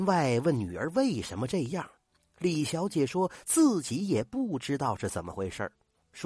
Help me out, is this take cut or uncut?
uncut